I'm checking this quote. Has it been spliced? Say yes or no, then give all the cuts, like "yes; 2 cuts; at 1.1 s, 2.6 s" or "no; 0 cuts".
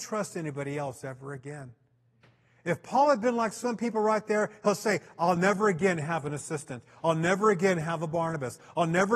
no; 0 cuts